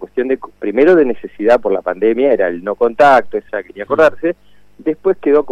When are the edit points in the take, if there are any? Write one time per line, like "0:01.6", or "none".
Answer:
0:03.5